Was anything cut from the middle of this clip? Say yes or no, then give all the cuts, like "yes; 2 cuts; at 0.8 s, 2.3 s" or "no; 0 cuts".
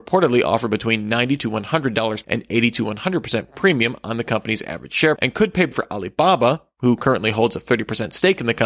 yes; 3 cuts; at 2.2 s, 5.2 s, 5.7 s